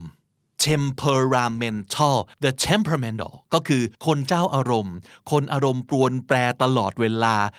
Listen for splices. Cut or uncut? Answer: cut